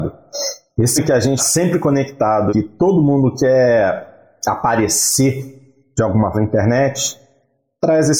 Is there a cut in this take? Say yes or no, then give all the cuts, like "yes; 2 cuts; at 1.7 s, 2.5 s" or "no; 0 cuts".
yes; 4 cuts; at 1.0 s, 1.4 s, 2.5 s, 6.3 s